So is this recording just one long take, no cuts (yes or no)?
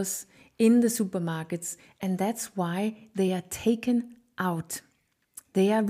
yes